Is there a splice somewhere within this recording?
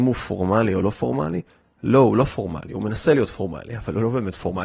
no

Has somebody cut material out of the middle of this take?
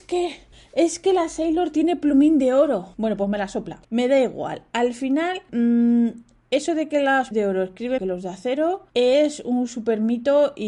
yes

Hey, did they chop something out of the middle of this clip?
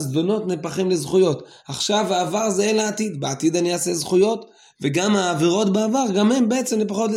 no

